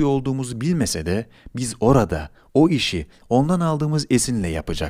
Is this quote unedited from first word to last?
yes; 0 cuts

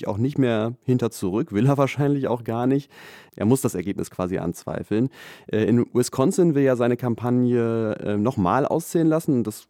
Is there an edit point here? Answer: no; 0 cuts

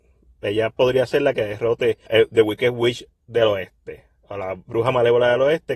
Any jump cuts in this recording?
yes; 1 cut; at 2.1 s

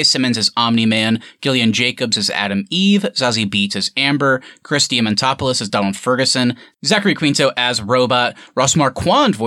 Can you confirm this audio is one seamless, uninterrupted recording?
yes; 0 cuts

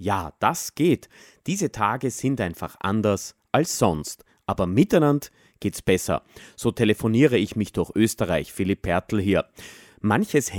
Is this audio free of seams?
yes; 0 cuts

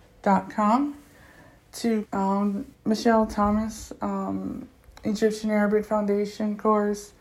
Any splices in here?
yes; 2 cuts; at 2.0 s, 2.7 s

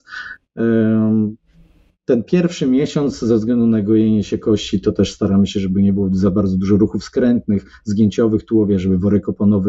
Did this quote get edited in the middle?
no; 0 cuts

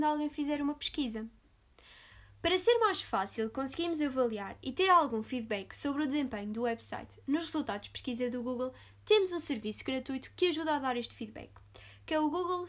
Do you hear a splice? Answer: no; 0 cuts

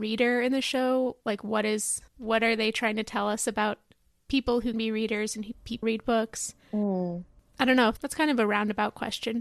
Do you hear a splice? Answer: yes; 4 cuts; at 2.1 s, 4.7 s, 5.8 s, 8.0 s

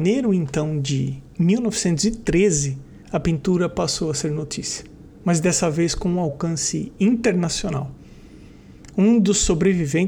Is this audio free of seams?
no; 1 cut; at 3.0 s

